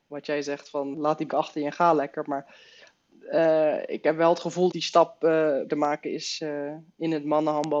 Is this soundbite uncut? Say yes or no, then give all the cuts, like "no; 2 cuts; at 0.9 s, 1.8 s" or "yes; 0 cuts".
no; 4 cuts; at 0.9 s, 1.3 s, 4.7 s, 5.7 s